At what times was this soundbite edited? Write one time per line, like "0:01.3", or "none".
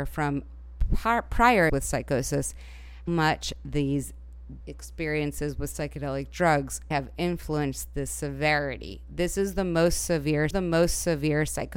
0:01.7
0:03.1
0:04.6
0:06.9
0:10.5